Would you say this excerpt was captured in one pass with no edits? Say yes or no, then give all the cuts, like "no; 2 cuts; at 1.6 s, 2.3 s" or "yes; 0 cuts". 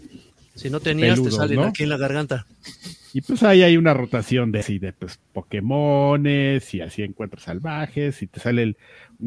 no; 1 cut; at 4.6 s